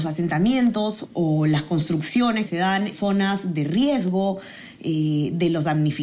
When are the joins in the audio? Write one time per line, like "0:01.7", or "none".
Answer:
0:01.0
0:02.4
0:02.9